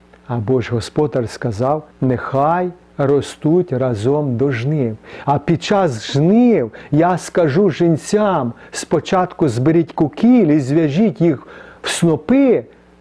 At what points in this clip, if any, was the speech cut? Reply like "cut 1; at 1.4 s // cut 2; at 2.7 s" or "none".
cut 1; at 1.9 s